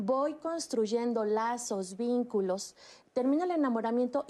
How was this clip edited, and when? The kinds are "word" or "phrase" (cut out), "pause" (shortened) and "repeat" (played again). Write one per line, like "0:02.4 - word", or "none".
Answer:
none